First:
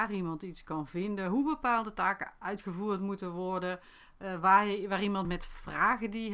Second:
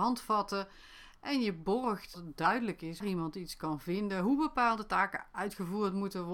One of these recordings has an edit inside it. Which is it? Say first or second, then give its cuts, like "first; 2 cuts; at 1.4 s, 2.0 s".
second; 2 cuts; at 2.1 s, 3.0 s